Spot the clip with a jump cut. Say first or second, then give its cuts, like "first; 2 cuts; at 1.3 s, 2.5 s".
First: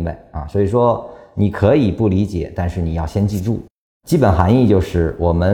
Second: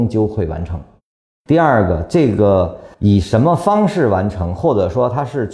second; 1 cut; at 2.9 s